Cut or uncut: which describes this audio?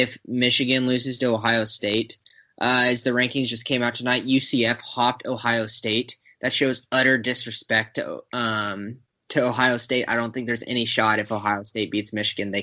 uncut